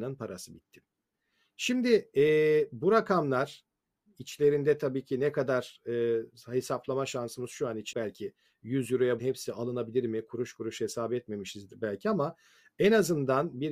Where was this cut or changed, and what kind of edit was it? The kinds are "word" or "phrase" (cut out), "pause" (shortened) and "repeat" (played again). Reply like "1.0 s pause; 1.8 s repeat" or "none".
7.9 s word; 9.2 s word